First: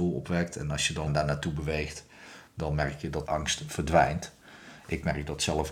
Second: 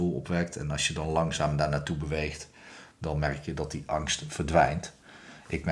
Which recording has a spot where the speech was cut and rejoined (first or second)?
first